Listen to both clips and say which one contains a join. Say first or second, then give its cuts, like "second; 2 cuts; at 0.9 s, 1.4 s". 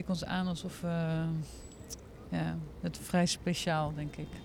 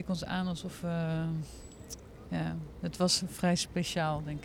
first; 1 cut; at 3.0 s